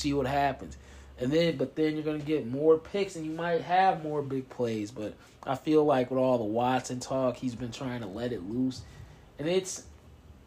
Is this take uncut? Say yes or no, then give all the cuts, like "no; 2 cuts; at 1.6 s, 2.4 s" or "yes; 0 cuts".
yes; 0 cuts